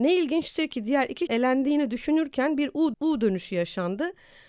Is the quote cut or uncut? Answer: cut